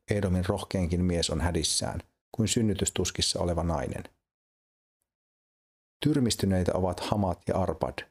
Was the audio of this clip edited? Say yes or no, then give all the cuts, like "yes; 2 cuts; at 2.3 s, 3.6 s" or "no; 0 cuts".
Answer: no; 0 cuts